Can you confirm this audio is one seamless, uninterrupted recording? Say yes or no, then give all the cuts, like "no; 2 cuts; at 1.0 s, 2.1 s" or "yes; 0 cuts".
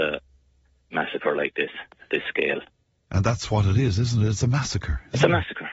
yes; 0 cuts